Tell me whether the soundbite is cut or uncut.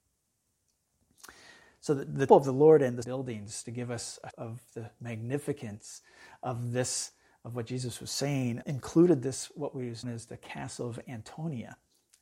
cut